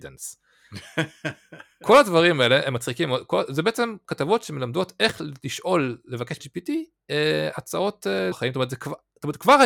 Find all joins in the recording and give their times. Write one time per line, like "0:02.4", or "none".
0:06.4
0:08.3